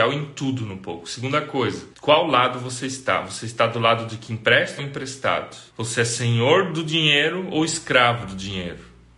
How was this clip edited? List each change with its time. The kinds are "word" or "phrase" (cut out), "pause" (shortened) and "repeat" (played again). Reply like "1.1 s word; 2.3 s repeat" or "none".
1.9 s pause; 4.8 s phrase; 5.7 s pause

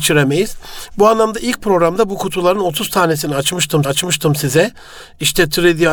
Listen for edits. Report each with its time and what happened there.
3.8 s repeat

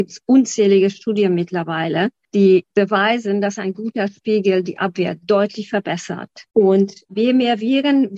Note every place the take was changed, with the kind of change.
6.5 s pause

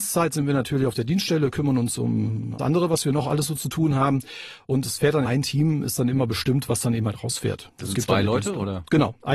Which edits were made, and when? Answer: 2.6 s word; 5.2 s word

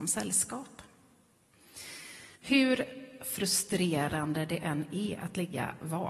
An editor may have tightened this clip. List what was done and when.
2.4 s pause

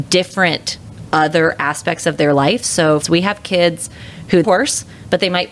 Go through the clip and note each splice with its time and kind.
3.0 s phrase; 4.4 s phrase

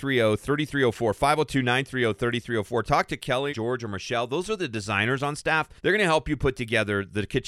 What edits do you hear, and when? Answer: 3.5 s word; 5.8 s pause

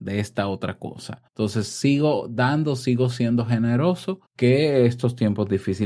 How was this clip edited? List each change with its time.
1.3 s pause; 4.2 s pause

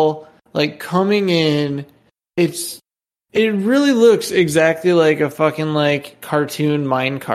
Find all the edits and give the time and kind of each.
none

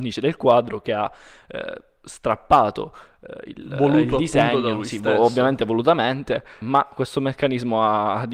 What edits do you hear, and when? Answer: 6.6 s word

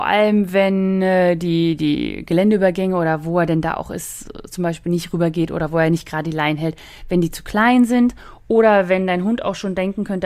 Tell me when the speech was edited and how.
none

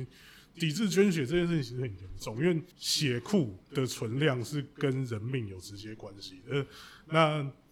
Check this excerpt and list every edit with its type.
2.7 s pause; 3.6 s pause

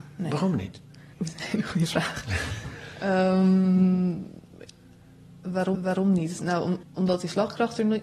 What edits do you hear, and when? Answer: 1.1 s pause; 5.7 s repeat; 6.8 s word

